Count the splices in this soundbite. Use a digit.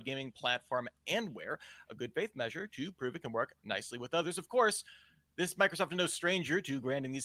0